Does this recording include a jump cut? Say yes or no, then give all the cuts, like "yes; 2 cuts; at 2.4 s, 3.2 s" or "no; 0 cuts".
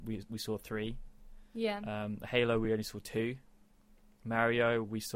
no; 0 cuts